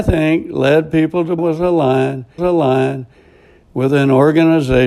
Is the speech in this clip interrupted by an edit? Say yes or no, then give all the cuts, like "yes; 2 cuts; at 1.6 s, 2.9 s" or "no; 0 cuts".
yes; 2 cuts; at 1.4 s, 2.4 s